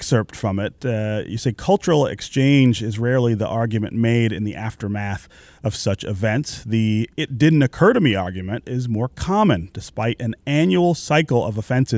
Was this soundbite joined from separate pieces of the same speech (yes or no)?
no